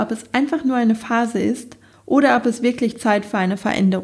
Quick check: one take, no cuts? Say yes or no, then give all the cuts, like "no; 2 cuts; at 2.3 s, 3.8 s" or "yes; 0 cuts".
yes; 0 cuts